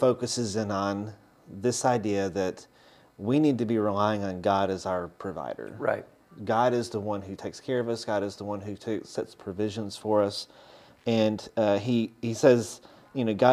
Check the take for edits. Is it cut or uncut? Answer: uncut